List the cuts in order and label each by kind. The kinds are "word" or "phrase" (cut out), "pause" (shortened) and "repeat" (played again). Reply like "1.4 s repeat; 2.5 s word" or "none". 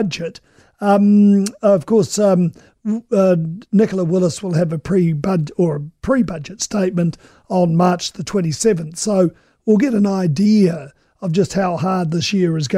none